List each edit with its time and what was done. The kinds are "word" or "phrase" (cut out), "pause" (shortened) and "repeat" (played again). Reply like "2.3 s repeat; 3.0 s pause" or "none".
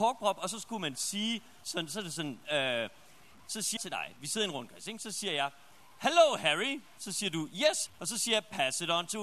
3.8 s word; 7.9 s word